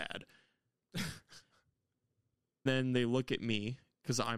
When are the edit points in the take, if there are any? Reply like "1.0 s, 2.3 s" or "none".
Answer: 2.7 s